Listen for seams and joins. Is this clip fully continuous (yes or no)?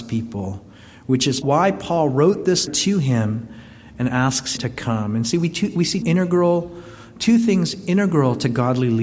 no